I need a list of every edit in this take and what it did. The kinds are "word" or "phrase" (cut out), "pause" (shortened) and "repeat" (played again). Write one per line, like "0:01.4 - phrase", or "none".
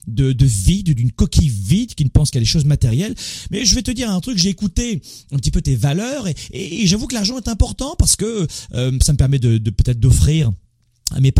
none